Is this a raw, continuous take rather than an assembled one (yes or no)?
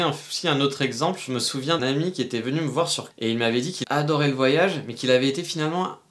no